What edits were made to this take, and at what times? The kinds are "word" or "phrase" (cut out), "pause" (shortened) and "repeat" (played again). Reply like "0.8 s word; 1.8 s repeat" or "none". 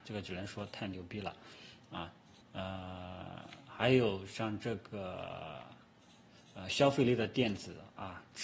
2.4 s phrase